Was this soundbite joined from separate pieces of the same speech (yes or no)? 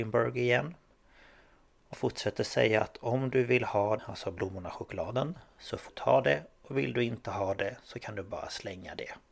yes